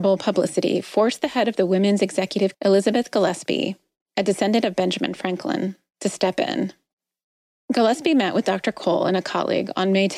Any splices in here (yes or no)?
yes